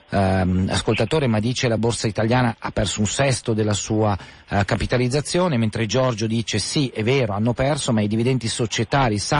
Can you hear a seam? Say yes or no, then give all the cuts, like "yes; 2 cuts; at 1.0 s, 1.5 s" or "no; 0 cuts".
no; 0 cuts